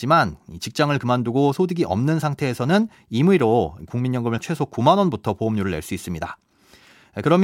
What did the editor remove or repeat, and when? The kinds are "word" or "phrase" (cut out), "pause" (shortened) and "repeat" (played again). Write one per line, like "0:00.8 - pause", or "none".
0:04.4 - word